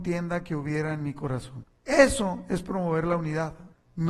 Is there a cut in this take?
no; 0 cuts

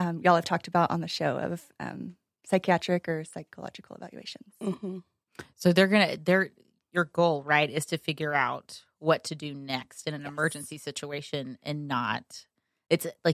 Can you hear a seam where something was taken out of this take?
no; 0 cuts

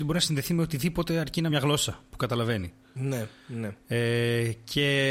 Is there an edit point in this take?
yes; 1 cut; at 1.5 s

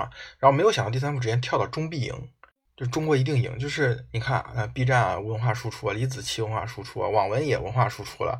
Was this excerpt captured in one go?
no; 1 cut; at 2.6 s

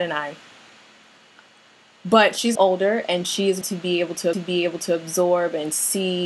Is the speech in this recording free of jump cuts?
no; 3 cuts; at 2.6 s, 3.6 s, 4.3 s

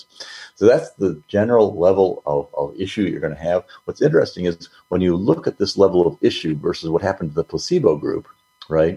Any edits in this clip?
no; 0 cuts

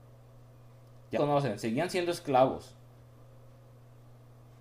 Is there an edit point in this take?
yes; 1 cut; at 1.1 s

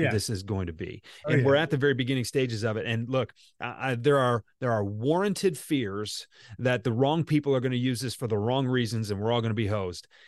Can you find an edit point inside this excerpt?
no; 0 cuts

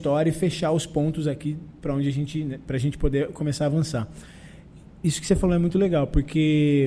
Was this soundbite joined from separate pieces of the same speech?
no; 0 cuts

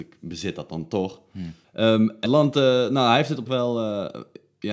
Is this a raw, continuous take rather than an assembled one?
no; 2 cuts; at 2.2 s, 3.5 s

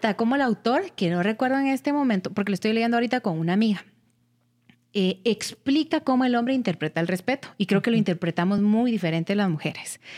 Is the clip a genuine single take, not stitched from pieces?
yes; 0 cuts

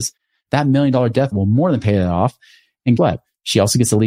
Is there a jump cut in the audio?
yes; 2 cuts; at 1.3 s, 3.0 s

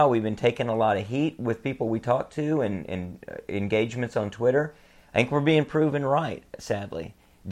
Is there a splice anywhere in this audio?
no; 0 cuts

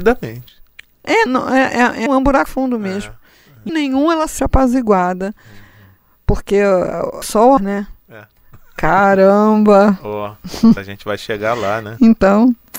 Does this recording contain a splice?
yes; 8 cuts; at 1.3 s, 2.1 s, 2.5 s, 3.7 s, 4.4 s, 7.2 s, 7.6 s, 10.8 s

